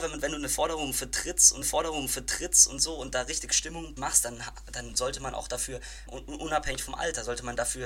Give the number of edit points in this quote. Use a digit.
3